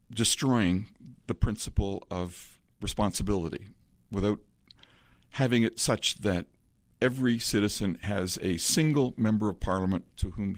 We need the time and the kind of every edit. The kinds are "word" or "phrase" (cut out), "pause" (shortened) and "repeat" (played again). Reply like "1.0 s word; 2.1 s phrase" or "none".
none